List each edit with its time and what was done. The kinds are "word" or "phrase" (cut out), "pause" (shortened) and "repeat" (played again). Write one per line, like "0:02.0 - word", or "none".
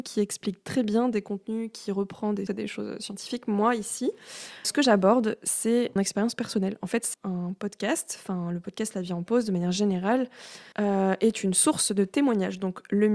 0:02.5 - word
0:04.6 - word
0:06.0 - word
0:07.1 - word
0:10.7 - pause